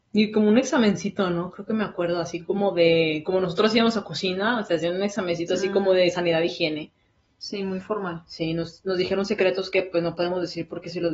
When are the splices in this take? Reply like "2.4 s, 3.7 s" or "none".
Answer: none